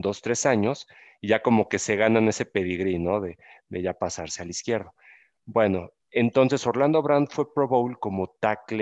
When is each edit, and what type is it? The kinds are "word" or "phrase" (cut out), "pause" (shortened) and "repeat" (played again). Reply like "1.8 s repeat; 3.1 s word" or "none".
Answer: 6.0 s pause